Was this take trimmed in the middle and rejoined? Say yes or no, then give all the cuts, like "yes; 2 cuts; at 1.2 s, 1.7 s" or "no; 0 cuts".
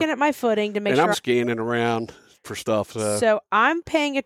yes; 2 cuts; at 1.1 s, 2.4 s